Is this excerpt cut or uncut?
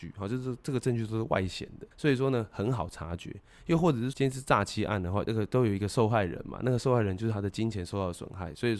cut